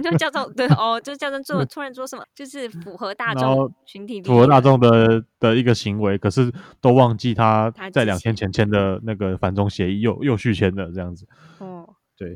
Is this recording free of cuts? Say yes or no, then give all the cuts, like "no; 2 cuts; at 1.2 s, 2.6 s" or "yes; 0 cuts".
no; 1 cut; at 2.2 s